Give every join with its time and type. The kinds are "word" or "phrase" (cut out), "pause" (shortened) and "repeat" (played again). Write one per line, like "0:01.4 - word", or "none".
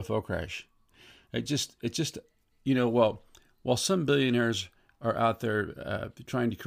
none